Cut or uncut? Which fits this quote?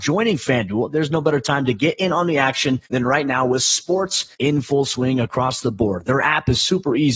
cut